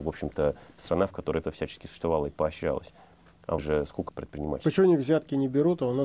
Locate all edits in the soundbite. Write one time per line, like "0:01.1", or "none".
0:01.4
0:03.6
0:04.1